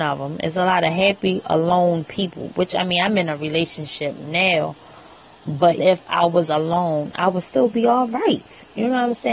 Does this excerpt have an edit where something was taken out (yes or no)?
yes